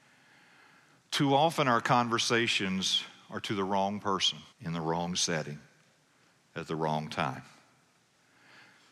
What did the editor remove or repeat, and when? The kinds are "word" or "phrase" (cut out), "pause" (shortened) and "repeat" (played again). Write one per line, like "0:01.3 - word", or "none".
0:04.5 - pause